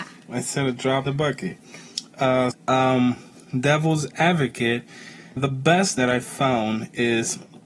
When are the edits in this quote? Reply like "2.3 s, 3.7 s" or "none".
1.1 s, 2.5 s, 5.4 s, 6.0 s